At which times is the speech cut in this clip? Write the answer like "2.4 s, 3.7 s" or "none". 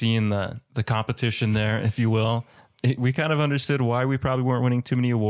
none